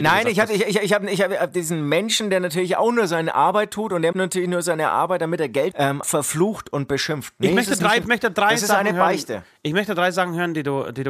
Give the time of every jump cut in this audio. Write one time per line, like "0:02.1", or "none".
0:04.1
0:05.7
0:06.0
0:08.0